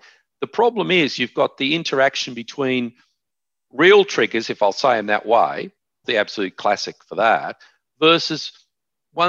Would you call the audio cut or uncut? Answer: cut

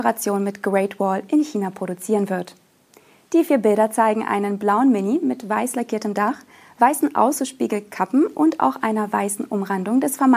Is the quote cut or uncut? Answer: uncut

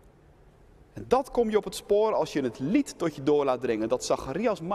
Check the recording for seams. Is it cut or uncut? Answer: uncut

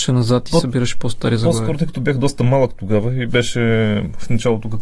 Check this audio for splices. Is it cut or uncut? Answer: uncut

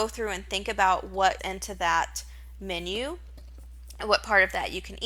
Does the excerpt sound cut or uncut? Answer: cut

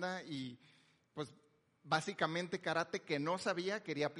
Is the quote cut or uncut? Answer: cut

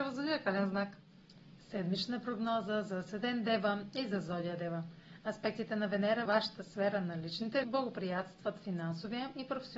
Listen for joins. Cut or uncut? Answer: cut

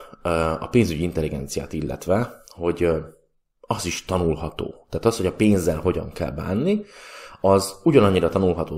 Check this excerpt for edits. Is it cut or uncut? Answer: uncut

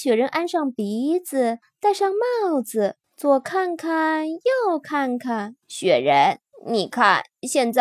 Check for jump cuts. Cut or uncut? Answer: cut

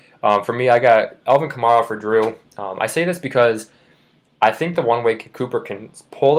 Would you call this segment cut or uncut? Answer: uncut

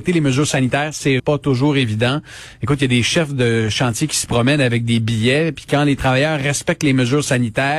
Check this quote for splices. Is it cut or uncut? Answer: cut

